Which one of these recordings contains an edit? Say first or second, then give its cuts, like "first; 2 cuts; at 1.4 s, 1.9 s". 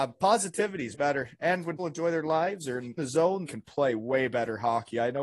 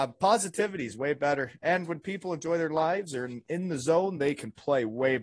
first; 4 cuts; at 0.9 s, 1.8 s, 3.0 s, 3.5 s